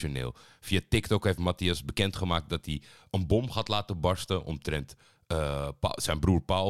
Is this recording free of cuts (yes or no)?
yes